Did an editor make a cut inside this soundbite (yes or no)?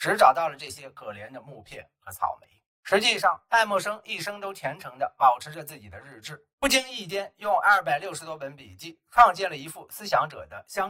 yes